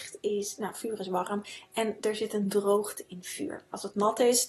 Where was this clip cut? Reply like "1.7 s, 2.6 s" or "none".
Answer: none